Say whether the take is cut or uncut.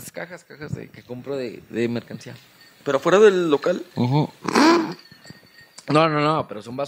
uncut